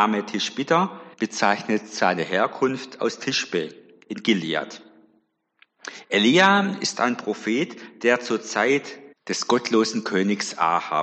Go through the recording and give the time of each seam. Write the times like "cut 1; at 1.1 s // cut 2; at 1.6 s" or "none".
cut 1; at 1.1 s // cut 2; at 9.1 s